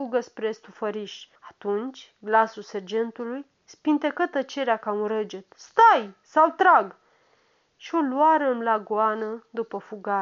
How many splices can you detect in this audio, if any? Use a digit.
1